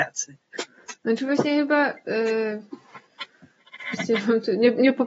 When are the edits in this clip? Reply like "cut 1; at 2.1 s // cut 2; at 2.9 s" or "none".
cut 1; at 1.0 s